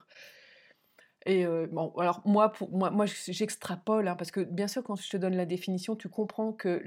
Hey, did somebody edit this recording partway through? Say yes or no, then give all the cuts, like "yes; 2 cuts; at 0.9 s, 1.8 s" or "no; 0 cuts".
no; 0 cuts